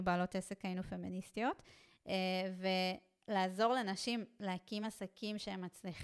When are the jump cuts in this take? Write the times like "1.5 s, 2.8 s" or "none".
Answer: none